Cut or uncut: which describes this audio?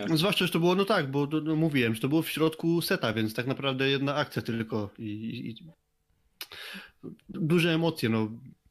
uncut